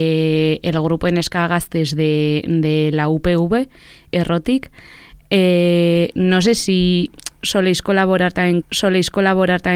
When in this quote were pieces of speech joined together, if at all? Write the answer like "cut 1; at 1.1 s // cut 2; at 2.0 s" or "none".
cut 1; at 8.6 s